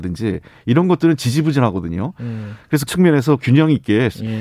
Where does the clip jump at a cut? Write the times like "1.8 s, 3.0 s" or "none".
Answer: 2.9 s, 3.4 s